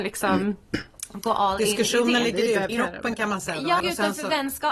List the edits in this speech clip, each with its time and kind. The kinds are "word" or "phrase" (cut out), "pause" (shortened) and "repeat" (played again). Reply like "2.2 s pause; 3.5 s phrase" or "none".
2.7 s word; 3.8 s word